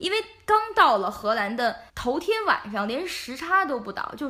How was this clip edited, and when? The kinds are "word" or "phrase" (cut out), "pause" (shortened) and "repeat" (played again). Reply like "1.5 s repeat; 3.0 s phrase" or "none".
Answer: 1.9 s pause